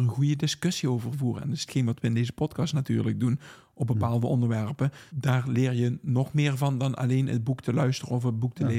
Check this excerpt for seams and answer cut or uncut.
cut